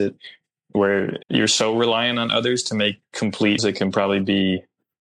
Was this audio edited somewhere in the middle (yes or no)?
yes